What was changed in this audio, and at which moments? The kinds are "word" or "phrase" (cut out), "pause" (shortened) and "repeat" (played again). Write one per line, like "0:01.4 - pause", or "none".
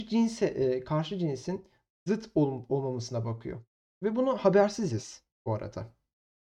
none